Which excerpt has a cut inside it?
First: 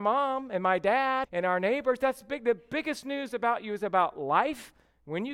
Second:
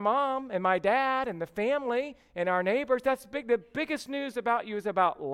first; 1 cut; at 1.2 s

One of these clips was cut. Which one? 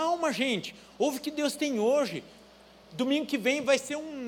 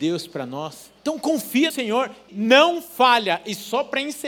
second; 3 cuts; at 1.0 s, 1.7 s, 2.3 s

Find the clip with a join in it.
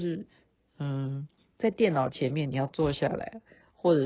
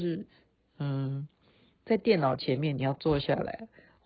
first; 1 cut; at 1.4 s

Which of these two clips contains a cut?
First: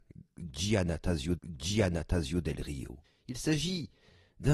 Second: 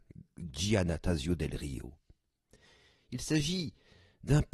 first; 2 cuts; at 1.4 s, 3.0 s

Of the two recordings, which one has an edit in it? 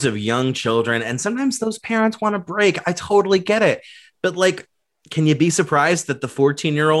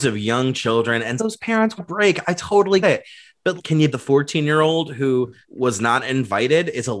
second; 6 cuts; at 1.2 s, 1.8 s, 2.8 s, 3.6 s, 3.9 s, 5.4 s

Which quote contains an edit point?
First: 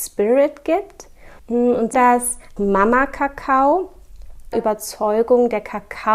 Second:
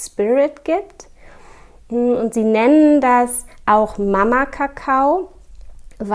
first; 4 cuts; at 1.4 s, 1.9 s, 2.6 s, 4.5 s

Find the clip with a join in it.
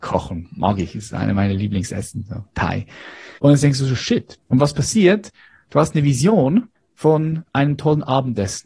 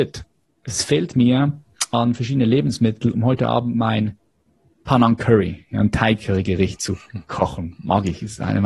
first; 3 cuts; at 3.4 s, 4.4 s, 6.7 s

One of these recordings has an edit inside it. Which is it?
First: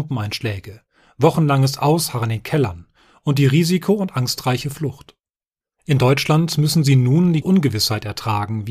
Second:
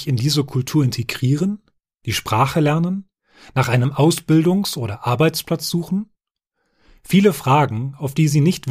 first; 1 cut; at 7.4 s

